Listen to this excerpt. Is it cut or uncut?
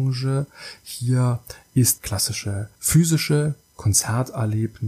cut